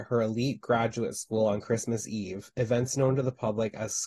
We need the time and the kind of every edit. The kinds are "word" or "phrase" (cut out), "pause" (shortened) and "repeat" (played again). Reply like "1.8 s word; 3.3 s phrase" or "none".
none